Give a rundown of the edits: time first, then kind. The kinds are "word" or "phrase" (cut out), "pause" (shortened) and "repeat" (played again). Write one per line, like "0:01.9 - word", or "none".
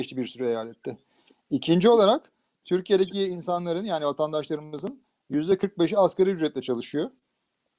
none